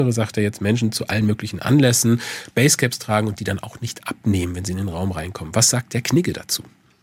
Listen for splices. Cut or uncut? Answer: uncut